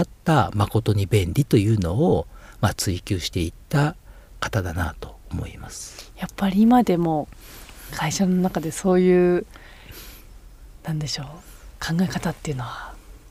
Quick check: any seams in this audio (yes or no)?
yes